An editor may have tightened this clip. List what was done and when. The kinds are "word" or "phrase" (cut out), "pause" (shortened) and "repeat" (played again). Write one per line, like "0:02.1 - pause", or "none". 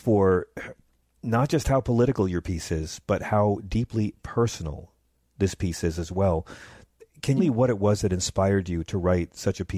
0:07.4 - phrase